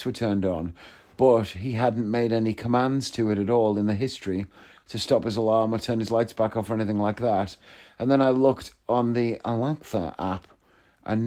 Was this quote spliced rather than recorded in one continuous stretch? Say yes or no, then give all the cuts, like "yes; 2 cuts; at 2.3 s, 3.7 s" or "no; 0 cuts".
no; 0 cuts